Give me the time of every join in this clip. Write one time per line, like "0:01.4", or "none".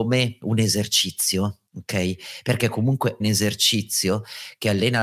0:01.7
0:03.2